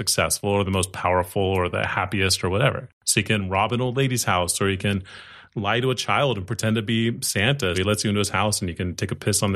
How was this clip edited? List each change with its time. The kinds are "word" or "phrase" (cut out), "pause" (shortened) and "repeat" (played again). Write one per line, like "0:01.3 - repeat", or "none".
0:07.7 - word